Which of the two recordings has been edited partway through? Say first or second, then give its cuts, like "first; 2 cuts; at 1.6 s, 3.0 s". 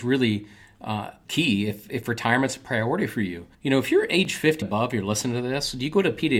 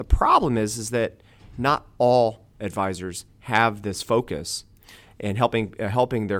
first; 3 cuts; at 1.3 s, 3.5 s, 4.6 s